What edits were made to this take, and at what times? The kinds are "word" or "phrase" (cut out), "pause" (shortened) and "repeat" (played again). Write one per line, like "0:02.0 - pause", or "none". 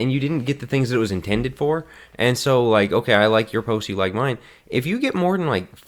none